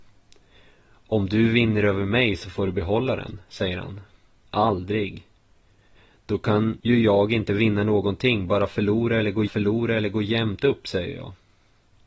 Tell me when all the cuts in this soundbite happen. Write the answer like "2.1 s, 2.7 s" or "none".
9.5 s